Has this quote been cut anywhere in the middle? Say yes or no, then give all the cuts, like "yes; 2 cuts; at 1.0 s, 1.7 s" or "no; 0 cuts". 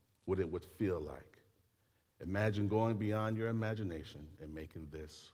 no; 0 cuts